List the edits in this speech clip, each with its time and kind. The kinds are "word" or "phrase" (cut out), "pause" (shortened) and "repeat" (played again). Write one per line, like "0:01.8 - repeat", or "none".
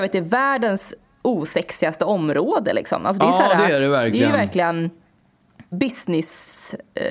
0:05.7 - word